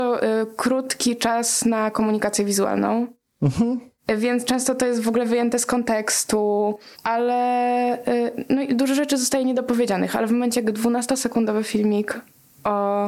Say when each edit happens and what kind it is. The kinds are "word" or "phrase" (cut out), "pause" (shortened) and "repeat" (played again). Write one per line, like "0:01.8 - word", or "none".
0:06.9 - pause